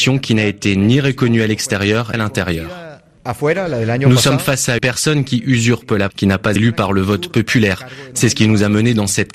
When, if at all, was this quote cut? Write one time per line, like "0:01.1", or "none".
0:02.1
0:04.8
0:06.1
0:06.6